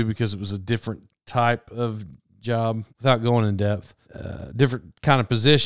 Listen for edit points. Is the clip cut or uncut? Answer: cut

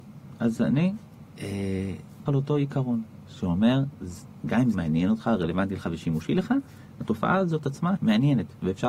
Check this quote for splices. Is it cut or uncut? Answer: cut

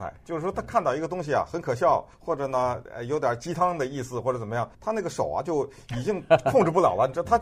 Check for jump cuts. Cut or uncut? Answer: cut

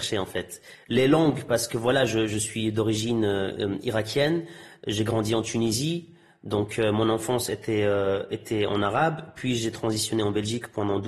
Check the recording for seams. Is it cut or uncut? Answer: uncut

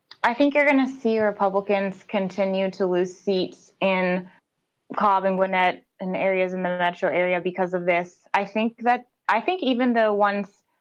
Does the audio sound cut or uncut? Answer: uncut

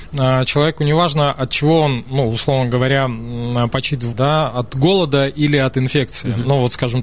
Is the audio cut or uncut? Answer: cut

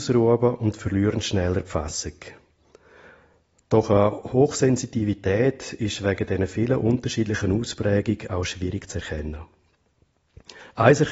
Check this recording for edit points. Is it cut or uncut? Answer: uncut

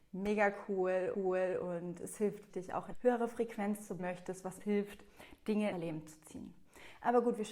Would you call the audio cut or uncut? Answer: cut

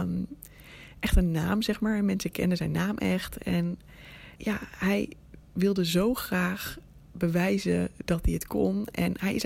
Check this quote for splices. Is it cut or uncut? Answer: cut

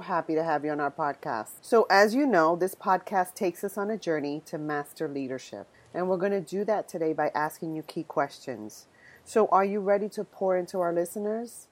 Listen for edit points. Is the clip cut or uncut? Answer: cut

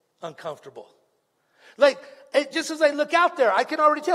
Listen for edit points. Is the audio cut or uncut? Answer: uncut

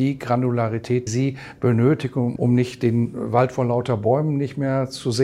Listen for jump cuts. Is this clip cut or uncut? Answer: cut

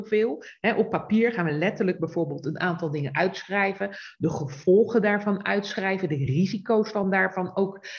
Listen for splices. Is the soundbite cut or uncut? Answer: uncut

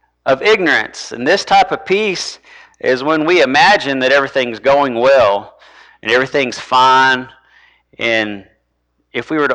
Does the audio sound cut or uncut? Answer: uncut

